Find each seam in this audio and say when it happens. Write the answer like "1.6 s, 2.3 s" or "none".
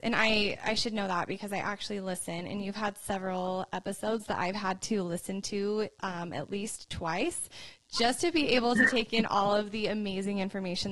none